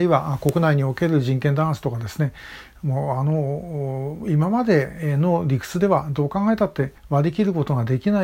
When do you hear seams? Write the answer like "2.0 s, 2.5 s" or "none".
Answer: 7.0 s